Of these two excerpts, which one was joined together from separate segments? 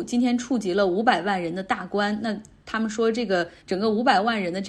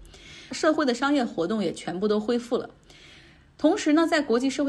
first; 1 cut; at 3.6 s

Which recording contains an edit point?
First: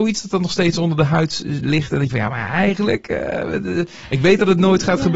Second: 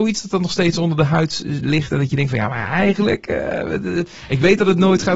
first; 1 cut; at 2.1 s

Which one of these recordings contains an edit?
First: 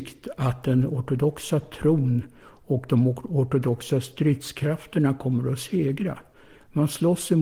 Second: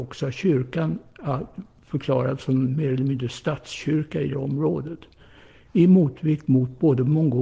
second; 1 cut; at 4.3 s

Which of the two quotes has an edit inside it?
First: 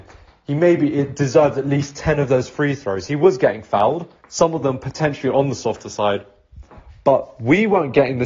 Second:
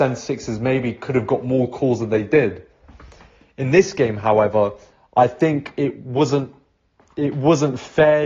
first; 1 cut; at 4.2 s

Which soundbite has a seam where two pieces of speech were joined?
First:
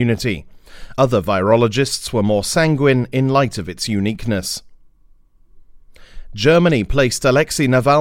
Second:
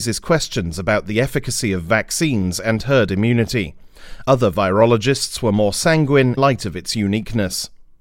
second; 1 cut; at 6.4 s

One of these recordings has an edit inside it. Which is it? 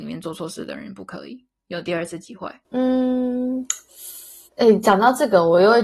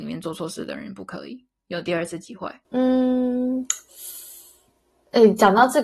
first; 1 cut; at 4.5 s

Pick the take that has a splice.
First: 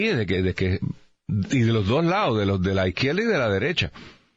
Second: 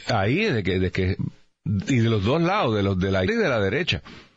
second; 1 cut; at 3.3 s

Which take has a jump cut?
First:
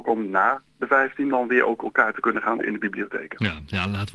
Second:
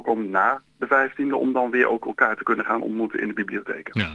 first; 2 cuts; at 1.3 s, 2.6 s

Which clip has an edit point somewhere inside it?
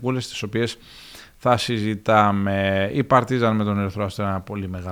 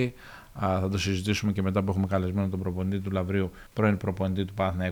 second; 1 cut; at 3.7 s

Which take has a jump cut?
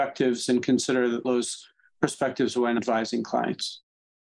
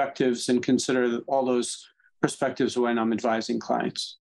first; 2 cuts; at 1.2 s, 2.8 s

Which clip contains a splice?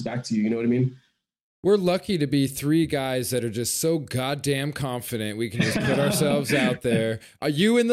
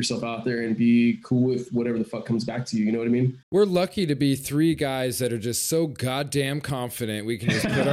second; 1 cut; at 3.4 s

